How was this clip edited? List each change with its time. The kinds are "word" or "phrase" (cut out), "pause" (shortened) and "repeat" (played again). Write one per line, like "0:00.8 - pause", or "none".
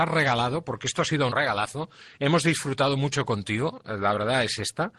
0:01.3 - word